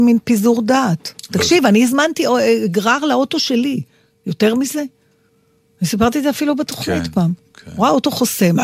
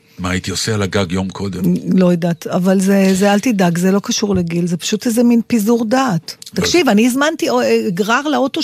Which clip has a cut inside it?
first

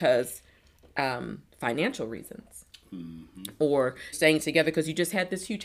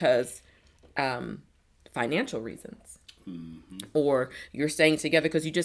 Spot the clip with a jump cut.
first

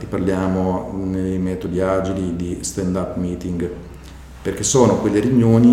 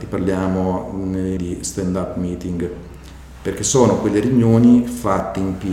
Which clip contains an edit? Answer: second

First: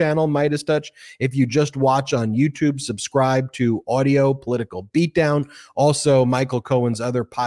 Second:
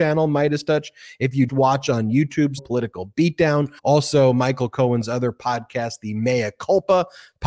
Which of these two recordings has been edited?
second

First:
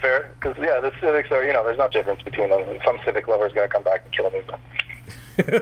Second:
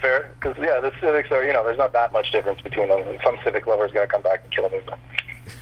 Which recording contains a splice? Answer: first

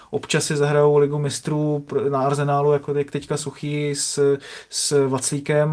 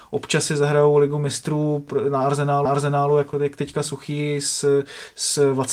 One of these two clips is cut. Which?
second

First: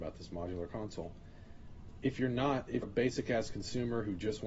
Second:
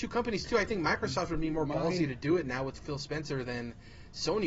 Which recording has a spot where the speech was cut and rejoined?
first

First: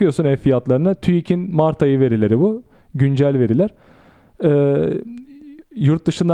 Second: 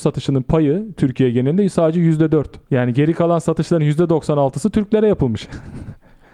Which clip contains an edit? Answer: second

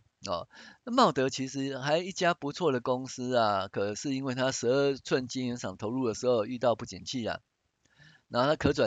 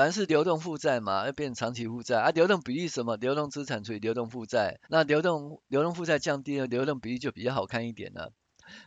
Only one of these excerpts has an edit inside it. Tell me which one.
second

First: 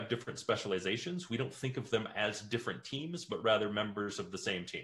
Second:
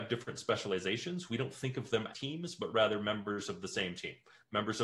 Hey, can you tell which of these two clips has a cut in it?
second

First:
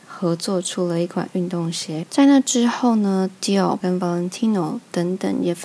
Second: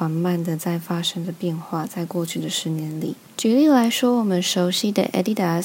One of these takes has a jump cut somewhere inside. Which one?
first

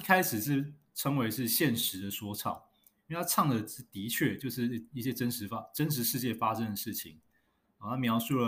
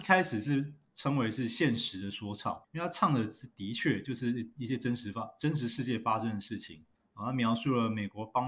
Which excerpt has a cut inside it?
second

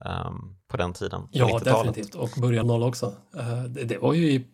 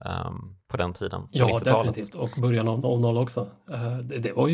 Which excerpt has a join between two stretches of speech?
first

